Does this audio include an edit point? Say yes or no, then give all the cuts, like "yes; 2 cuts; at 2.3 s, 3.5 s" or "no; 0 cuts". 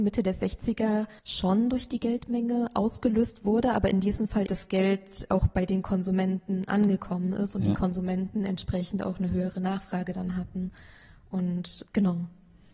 yes; 2 cuts; at 1.2 s, 4.5 s